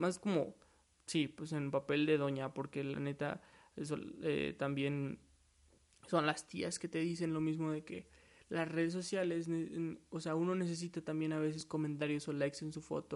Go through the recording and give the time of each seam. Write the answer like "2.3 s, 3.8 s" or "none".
none